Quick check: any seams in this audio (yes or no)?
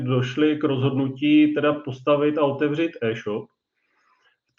no